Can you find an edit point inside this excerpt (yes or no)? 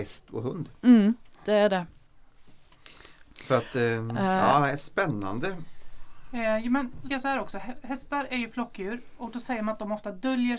yes